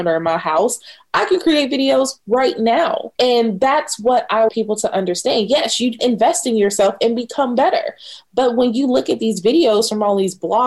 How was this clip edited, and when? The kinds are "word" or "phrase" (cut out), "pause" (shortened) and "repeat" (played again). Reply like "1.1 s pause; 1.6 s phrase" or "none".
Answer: 3.2 s pause; 4.5 s word; 6.0 s word